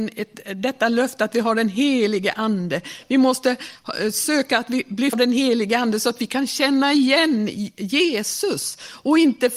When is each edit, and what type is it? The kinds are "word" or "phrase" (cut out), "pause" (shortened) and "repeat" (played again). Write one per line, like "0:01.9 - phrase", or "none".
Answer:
0:05.1 - word